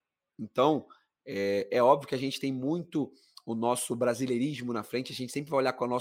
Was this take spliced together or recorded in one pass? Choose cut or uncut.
uncut